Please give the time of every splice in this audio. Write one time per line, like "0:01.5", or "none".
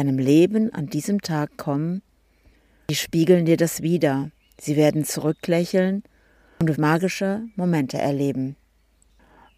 0:06.7